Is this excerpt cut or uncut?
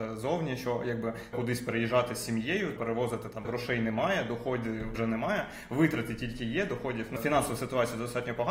cut